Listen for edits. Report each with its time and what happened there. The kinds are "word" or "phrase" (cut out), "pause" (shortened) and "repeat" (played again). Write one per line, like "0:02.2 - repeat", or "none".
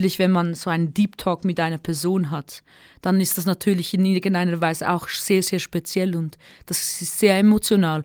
none